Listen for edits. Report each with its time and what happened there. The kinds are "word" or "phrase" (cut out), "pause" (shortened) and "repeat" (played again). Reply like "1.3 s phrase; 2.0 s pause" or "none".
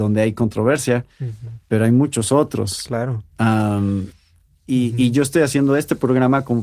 none